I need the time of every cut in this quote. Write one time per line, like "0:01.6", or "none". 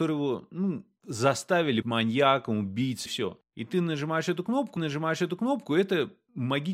0:01.8
0:03.1
0:04.8